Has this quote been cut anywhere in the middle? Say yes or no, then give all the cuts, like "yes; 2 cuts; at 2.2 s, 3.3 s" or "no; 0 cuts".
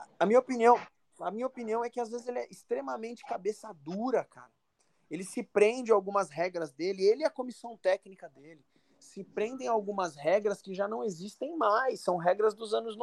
no; 0 cuts